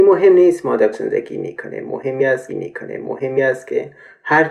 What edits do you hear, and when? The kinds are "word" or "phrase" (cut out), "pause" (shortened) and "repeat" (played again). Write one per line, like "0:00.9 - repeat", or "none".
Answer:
0:00.9 - word
0:02.5 - repeat